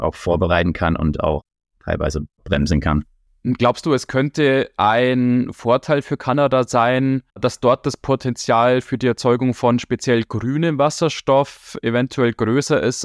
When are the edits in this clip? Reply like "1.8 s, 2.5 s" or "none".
7.3 s